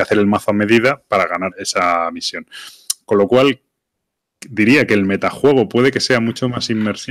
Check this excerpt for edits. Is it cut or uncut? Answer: cut